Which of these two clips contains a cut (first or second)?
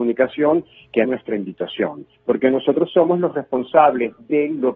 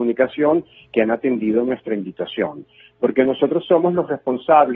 first